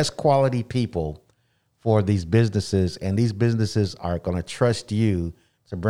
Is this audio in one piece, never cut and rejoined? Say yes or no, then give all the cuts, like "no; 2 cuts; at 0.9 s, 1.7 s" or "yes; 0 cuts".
yes; 0 cuts